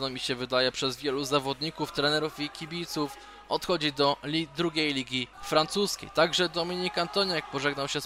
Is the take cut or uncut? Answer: cut